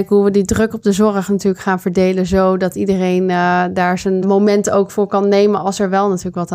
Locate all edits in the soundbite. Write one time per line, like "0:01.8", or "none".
none